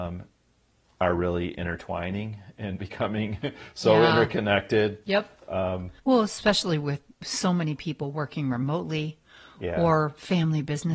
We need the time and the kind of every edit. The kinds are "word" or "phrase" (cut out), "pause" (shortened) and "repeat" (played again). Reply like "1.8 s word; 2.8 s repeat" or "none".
5.0 s pause; 6.0 s pause